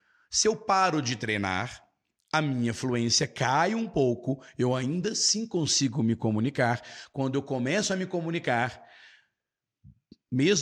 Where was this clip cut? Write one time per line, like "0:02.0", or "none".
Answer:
none